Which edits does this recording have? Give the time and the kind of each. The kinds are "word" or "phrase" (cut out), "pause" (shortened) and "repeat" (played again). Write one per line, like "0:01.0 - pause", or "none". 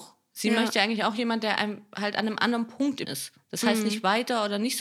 0:03.0 - word